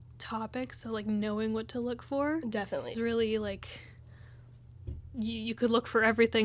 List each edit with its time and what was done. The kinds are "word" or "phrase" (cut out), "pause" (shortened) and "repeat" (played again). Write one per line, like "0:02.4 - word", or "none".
0:02.9 - word